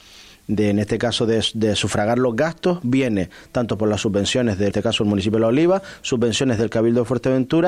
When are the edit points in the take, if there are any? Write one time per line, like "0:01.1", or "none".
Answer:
0:04.7